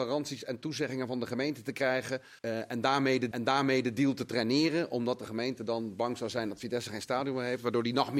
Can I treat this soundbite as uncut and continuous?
no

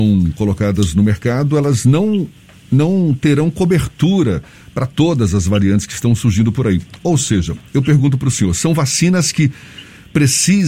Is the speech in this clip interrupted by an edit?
no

